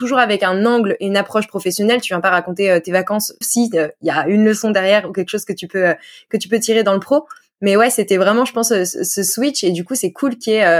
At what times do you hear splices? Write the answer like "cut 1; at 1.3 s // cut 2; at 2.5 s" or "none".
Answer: cut 1; at 3.4 s